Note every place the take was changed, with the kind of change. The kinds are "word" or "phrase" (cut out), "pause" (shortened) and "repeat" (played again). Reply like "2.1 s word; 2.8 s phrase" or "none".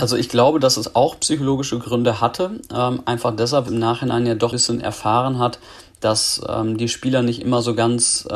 3.7 s phrase; 4.5 s phrase

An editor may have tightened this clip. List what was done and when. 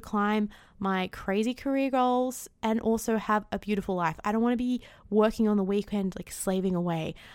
none

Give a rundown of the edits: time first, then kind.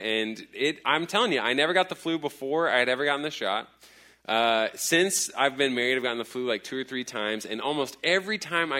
none

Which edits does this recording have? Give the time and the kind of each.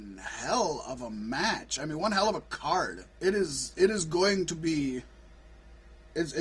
3.1 s pause; 5.3 s pause

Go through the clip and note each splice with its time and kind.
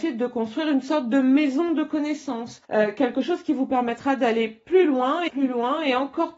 2.6 s pause; 5.3 s word

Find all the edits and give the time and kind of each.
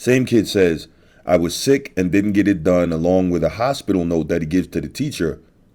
none

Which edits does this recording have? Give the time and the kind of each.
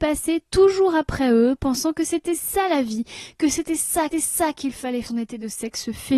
4.1 s repeat; 5.0 s phrase

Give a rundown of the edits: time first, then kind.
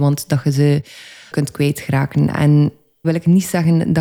1.3 s word; 3.0 s word

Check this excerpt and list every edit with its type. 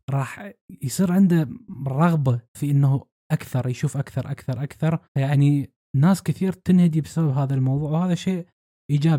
2.5 s pause; 5.1 s pause

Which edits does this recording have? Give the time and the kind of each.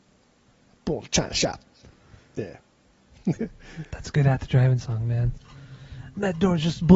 none

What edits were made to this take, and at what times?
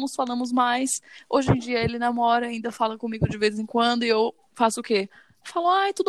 none

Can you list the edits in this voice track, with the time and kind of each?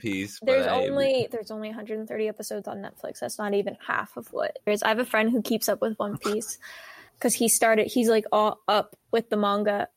4.7 s phrase; 7.1 s pause

